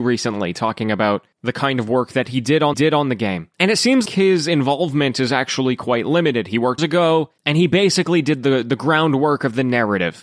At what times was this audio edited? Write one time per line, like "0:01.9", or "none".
0:01.3
0:02.7
0:03.5
0:04.1
0:06.8
0:07.4